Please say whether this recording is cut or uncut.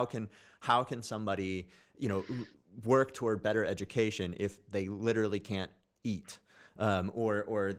uncut